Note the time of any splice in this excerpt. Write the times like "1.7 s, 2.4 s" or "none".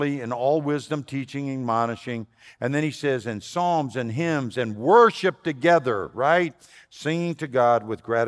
none